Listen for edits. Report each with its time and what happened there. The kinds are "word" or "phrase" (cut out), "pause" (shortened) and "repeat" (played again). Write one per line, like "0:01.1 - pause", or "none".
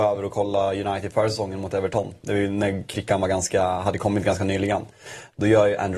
none